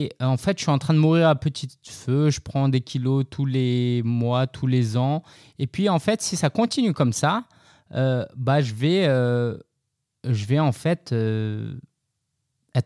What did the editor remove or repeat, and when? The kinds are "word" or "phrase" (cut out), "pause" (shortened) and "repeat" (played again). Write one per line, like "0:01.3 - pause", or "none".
none